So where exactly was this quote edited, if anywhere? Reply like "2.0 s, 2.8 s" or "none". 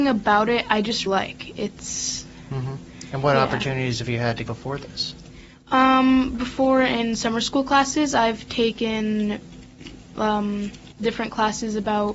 1.1 s, 4.5 s, 5.5 s, 10.9 s